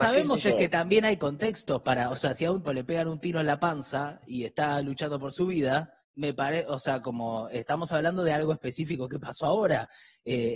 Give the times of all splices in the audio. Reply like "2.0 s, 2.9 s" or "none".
2.7 s, 6.0 s